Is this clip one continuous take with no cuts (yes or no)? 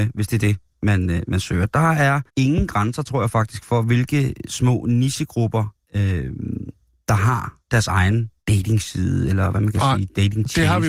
no